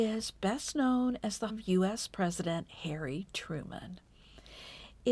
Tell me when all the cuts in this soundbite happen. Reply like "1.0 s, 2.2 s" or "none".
1.5 s